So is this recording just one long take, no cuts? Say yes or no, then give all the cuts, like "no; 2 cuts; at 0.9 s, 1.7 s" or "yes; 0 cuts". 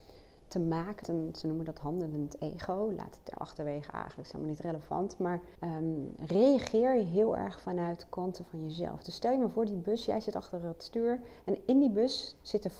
no; 3 cuts; at 1.0 s, 3.3 s, 5.5 s